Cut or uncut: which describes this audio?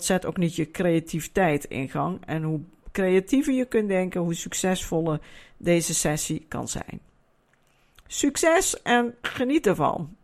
uncut